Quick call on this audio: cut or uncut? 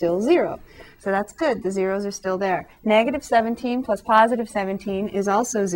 cut